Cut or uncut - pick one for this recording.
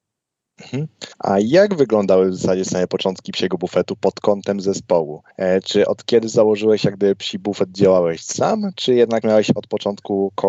cut